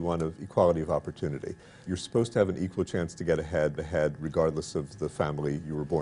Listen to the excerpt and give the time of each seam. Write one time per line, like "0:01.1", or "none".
0:01.9
0:03.8